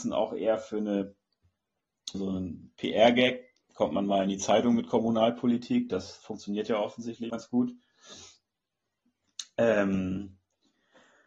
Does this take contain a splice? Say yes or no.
yes